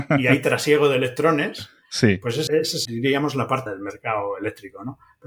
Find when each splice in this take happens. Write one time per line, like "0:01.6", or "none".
0:02.5
0:02.8
0:03.7